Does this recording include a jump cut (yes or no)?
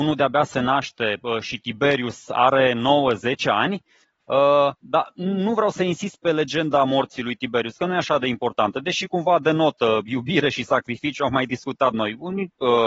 yes